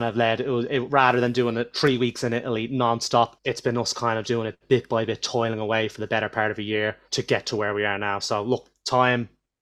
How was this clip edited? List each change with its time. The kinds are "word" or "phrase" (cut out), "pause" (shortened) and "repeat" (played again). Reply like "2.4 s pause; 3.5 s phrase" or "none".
3.3 s pause; 4.2 s word; 7.0 s word